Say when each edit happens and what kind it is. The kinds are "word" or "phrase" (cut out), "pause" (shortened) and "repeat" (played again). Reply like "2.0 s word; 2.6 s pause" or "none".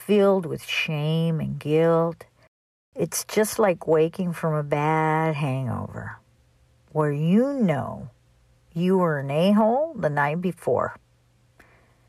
none